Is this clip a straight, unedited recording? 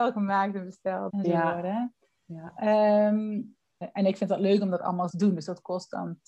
no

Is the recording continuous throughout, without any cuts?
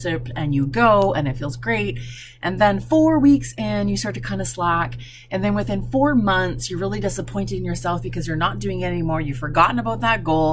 yes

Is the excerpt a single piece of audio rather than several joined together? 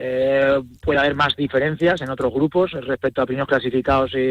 yes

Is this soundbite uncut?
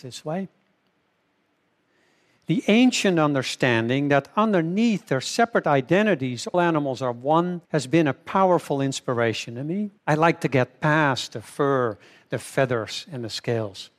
no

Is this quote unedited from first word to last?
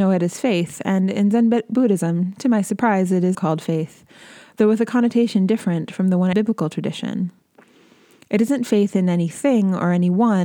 no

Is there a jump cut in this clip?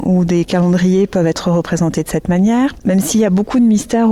no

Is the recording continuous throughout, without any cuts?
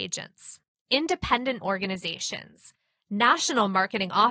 no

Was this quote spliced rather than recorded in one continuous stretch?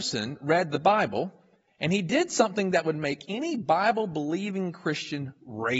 no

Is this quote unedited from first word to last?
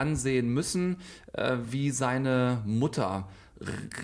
yes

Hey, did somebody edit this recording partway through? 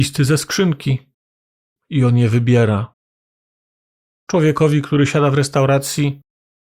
no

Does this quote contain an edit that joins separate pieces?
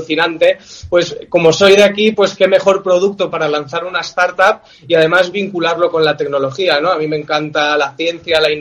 no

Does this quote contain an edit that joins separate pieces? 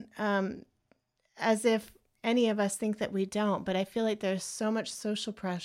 no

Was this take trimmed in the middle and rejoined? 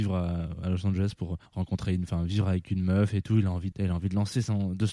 yes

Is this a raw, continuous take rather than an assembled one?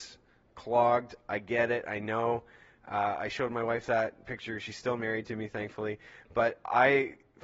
yes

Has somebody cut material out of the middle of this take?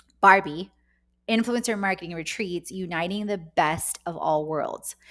no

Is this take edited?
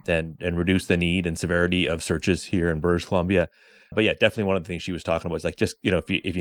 yes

